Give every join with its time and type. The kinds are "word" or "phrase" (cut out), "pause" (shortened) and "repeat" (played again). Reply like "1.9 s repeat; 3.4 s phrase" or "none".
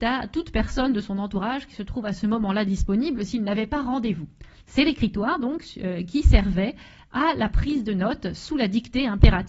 none